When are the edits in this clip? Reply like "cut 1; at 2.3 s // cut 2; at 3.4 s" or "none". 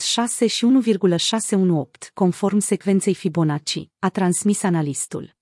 none